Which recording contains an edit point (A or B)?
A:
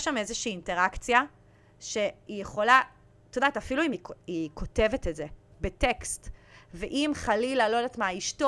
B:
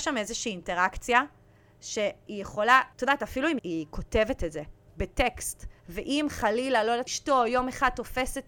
B